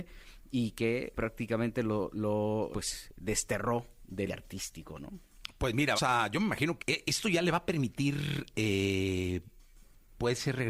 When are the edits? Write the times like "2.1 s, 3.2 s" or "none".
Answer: 1.1 s, 2.7 s, 4.3 s, 6.0 s, 6.8 s